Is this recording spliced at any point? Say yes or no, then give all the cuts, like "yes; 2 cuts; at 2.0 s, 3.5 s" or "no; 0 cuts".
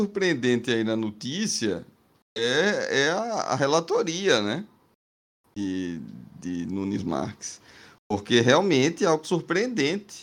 no; 0 cuts